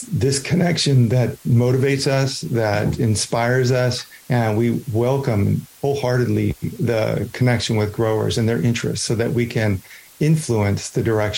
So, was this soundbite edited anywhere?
yes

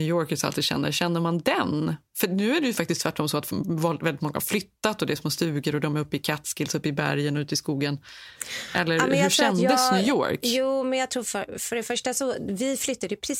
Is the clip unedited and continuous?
yes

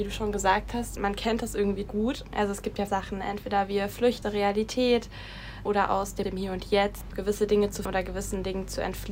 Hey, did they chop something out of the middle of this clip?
yes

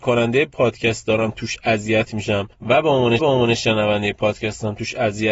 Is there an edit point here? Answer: yes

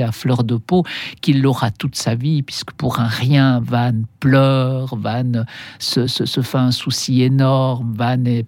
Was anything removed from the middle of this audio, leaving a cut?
no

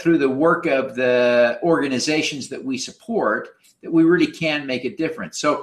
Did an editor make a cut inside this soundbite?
no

